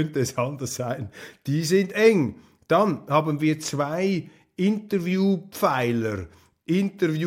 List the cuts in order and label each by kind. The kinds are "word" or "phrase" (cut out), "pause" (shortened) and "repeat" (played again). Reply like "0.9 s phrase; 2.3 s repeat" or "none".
none